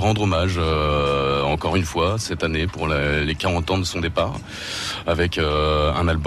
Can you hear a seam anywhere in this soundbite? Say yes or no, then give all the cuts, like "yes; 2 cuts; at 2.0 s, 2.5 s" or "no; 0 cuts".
no; 0 cuts